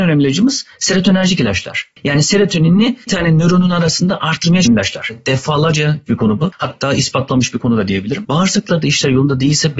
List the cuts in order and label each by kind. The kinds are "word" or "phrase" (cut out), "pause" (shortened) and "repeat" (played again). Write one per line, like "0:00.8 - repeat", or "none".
0:03.1 - word
0:04.6 - word
0:06.1 - word